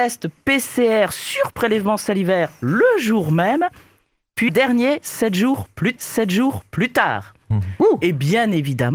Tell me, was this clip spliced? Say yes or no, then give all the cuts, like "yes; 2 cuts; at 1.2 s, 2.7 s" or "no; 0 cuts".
yes; 2 cuts; at 4.5 s, 6.0 s